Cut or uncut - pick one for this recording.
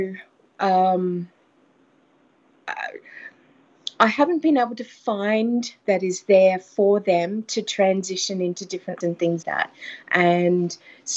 cut